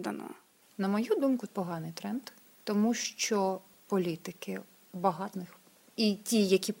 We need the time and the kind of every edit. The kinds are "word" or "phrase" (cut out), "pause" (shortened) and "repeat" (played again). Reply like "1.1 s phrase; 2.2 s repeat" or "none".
1.5 s word; 5.3 s word